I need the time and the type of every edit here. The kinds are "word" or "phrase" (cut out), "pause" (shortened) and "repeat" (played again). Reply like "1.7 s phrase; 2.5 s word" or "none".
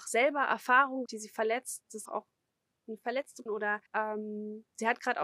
1.1 s word; 2.1 s word; 3.5 s word; 3.9 s pause